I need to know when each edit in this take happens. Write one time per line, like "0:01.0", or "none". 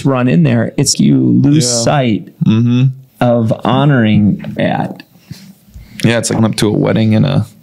0:00.9
0:03.1
0:04.6
0:06.4